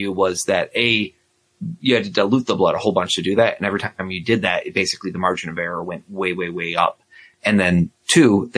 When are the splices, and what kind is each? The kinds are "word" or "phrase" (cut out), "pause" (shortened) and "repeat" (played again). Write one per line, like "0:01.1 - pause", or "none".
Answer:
none

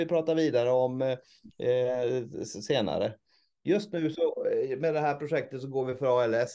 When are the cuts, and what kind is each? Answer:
none

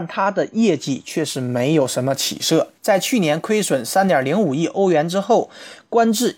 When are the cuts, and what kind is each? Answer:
0:02.8 - pause

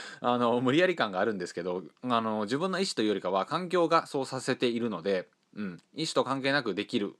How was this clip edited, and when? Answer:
0:01.9 - pause

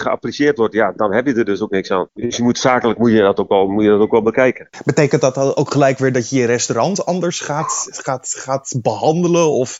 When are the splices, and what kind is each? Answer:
none

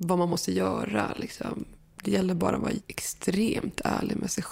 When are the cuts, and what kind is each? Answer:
none

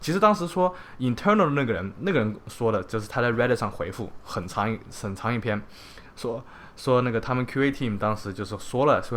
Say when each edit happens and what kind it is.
none

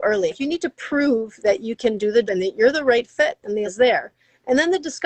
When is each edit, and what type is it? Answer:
0:02.3 - word
0:03.7 - word

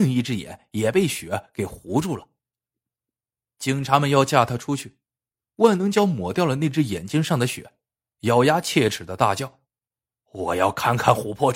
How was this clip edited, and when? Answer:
0:09.6 - pause

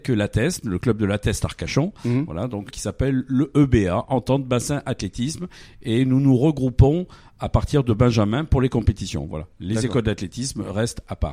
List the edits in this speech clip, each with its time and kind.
0:02.7 - phrase

